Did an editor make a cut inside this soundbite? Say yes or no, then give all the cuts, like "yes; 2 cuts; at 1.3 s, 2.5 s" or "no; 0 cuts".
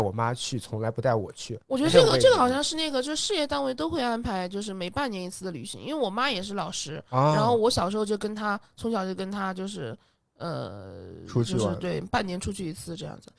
no; 0 cuts